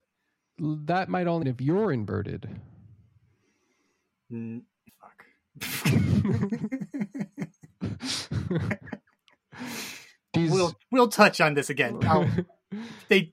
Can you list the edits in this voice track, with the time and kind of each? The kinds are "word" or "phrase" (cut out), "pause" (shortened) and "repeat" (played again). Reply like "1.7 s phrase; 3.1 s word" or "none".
1.4 s word; 4.9 s word; 10.3 s word; 12.0 s word